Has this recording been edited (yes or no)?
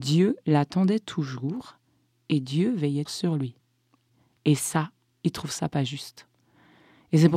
yes